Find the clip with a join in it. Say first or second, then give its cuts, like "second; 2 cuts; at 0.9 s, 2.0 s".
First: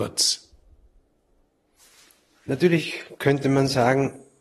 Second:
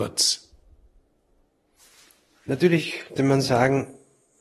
second; 1 cut; at 3.2 s